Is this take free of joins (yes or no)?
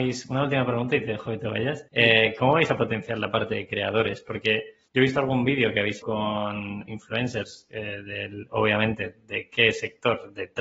no